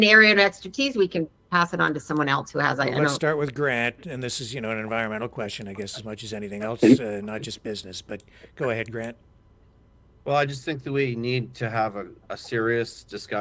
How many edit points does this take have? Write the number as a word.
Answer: zero